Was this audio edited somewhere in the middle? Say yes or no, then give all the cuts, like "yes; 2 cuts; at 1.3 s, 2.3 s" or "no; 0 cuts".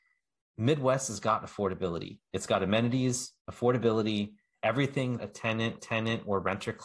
yes; 3 cuts; at 3.4 s, 5.2 s, 5.8 s